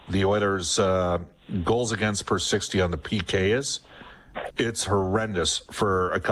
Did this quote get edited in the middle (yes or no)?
no